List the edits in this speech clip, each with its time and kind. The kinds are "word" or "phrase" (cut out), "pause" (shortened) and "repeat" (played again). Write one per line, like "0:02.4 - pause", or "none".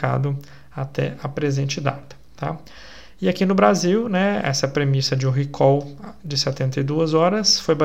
none